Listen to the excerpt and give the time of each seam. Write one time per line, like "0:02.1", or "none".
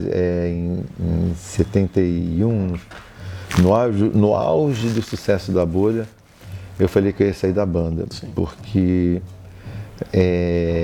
none